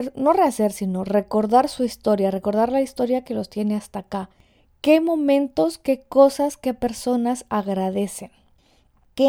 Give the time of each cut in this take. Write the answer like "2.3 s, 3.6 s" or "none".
none